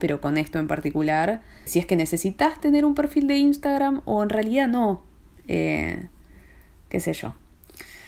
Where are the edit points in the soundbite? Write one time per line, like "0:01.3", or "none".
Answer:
0:01.7